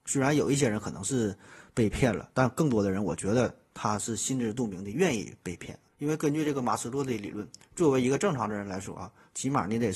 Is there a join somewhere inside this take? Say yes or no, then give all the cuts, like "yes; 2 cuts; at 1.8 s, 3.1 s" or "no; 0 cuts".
yes; 1 cut; at 5.9 s